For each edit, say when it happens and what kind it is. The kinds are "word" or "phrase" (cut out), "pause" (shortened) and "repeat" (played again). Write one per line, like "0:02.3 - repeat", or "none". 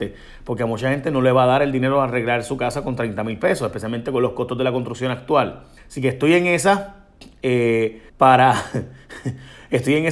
0:05.8 - pause
0:08.1 - pause